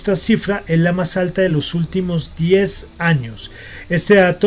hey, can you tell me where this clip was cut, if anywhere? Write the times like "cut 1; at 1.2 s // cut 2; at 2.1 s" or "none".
none